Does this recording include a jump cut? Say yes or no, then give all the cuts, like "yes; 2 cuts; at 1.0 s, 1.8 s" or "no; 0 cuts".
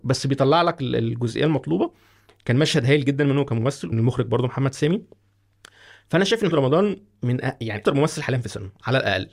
yes; 3 cuts; at 3.9 s, 6.5 s, 7.8 s